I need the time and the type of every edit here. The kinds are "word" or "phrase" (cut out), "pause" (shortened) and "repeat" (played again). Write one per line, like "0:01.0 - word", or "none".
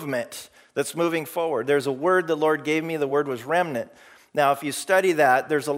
none